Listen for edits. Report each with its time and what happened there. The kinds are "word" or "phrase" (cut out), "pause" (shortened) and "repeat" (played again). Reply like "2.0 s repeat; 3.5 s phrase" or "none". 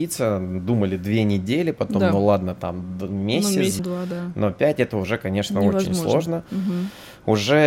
3.8 s word